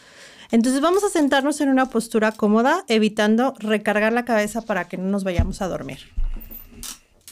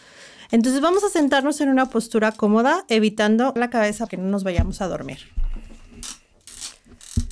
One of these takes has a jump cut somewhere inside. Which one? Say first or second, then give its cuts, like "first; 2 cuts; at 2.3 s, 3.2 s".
second; 2 cuts; at 3.6 s, 4.1 s